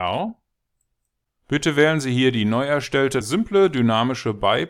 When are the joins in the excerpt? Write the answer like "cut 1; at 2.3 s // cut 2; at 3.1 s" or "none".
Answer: cut 1; at 3.2 s